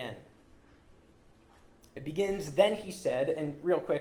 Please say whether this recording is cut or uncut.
uncut